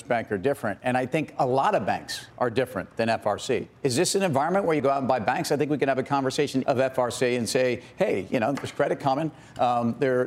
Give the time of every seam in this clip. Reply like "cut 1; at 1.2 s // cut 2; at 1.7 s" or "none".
cut 1; at 2.3 s // cut 2; at 4.8 s // cut 3; at 6.6 s